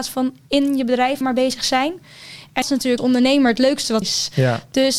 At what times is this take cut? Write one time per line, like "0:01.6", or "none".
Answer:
0:01.2
0:02.6
0:03.0
0:04.0